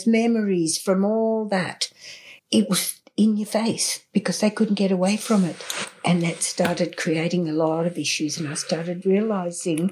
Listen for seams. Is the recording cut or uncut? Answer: cut